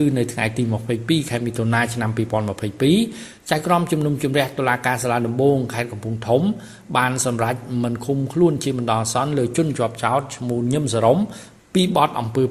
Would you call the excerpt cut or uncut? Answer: uncut